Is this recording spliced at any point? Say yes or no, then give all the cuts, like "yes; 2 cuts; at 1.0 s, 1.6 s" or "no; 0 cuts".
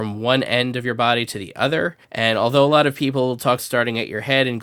yes; 2 cuts; at 2.0 s, 3.6 s